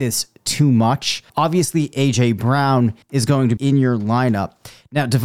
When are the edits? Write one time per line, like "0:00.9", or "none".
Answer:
0:01.3
0:03.0
0:03.6